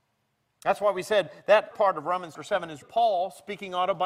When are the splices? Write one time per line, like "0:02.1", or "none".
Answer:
0:01.7
0:02.3
0:02.8